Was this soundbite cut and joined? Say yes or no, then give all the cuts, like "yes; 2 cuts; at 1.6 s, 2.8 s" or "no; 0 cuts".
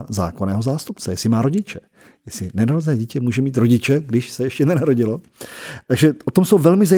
no; 0 cuts